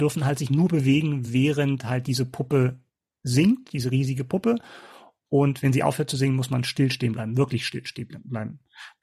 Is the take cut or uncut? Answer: uncut